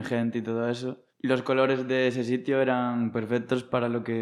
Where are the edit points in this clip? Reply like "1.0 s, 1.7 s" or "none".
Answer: 1.1 s